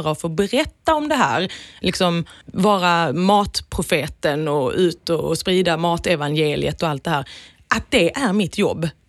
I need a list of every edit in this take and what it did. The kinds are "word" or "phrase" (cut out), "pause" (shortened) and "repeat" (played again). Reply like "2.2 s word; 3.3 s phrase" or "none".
2.4 s word